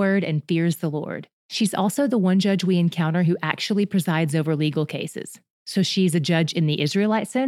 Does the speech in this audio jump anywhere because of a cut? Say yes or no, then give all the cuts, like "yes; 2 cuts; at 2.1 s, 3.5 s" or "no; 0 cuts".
yes; 1 cut; at 1.4 s